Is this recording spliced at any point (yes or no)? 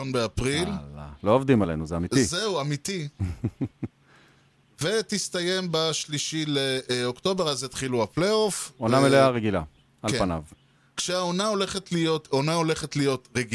no